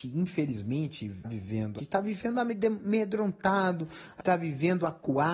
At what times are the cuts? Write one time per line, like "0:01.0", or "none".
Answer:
0:01.2
0:01.8
0:04.2